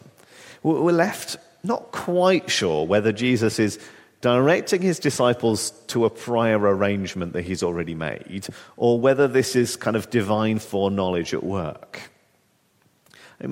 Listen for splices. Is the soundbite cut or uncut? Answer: uncut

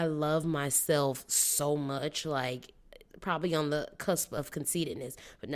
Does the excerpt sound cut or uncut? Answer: uncut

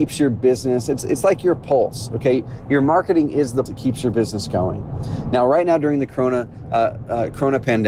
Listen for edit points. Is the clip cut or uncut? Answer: cut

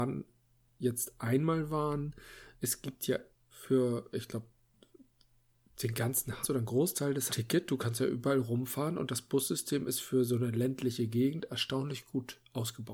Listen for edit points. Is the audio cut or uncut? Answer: cut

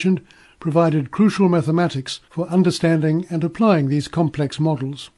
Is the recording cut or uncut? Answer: cut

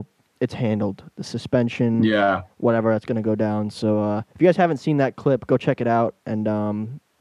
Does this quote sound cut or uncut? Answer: cut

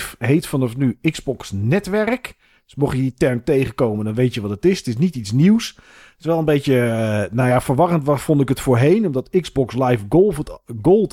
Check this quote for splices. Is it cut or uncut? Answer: uncut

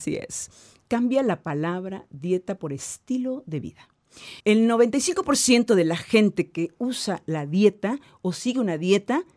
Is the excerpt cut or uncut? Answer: cut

